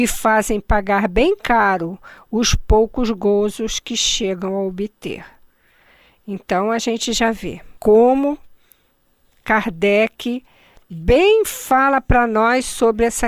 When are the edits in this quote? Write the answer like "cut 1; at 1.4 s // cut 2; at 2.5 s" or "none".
cut 1; at 7.8 s